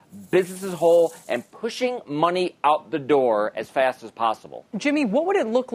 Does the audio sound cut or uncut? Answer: uncut